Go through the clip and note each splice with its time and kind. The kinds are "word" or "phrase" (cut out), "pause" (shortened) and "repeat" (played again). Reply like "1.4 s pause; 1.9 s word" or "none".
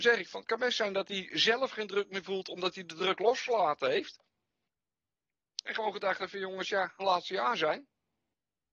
7.0 s phrase

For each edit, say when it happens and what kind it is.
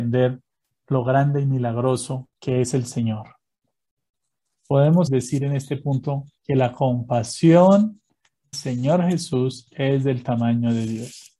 2.3 s pause; 5.1 s word; 6.4 s pause; 8.5 s word

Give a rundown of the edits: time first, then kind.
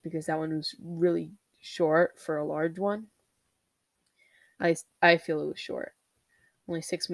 none

